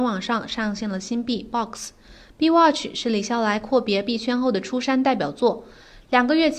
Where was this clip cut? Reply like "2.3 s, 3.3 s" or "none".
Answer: none